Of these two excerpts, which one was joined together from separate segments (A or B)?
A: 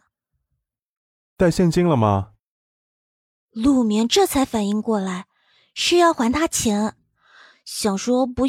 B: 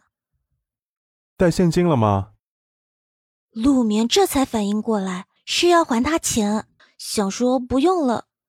B